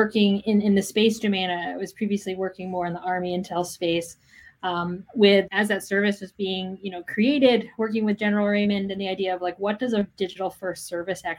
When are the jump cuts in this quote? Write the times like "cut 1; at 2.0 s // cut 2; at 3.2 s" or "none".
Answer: cut 1; at 5.5 s